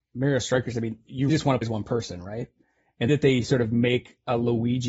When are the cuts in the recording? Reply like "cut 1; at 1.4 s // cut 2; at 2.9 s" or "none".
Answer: cut 1; at 1.3 s // cut 2; at 1.6 s // cut 3; at 3.1 s